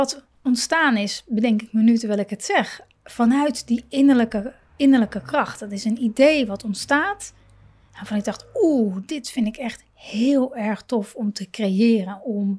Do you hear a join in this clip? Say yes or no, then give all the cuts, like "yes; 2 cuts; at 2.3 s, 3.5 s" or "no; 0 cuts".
no; 0 cuts